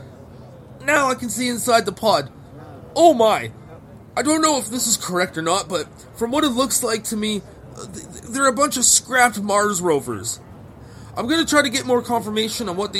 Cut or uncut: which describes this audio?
uncut